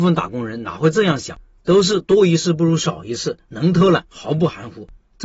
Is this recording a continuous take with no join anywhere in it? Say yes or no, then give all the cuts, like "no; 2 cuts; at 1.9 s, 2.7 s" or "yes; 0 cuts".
yes; 0 cuts